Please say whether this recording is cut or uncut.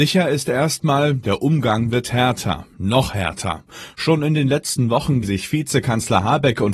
cut